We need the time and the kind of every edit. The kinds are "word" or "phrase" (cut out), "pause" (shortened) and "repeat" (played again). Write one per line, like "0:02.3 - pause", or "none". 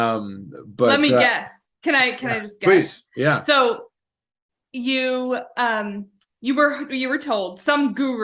none